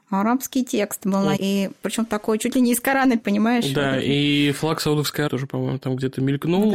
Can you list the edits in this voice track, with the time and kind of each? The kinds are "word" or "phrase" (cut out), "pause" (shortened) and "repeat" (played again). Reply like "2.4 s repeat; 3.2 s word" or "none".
1.4 s word; 3.2 s word; 5.3 s word

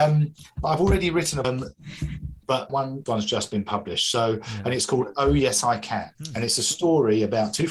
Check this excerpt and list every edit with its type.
1.4 s phrase; 2.7 s phrase; 3.1 s phrase

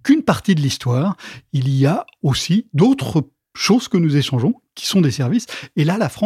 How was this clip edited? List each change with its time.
none

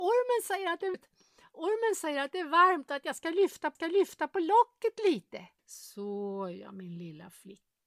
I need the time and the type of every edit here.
0.9 s word; 3.8 s repeat; 5.6 s pause

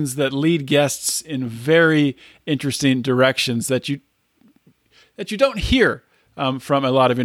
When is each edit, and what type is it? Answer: none

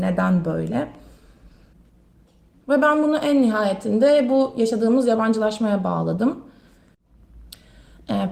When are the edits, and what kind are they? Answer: none

